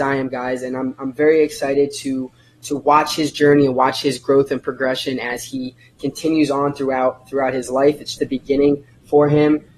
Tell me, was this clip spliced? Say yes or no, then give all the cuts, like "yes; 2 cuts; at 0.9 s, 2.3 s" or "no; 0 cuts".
yes; 1 cut; at 8.2 s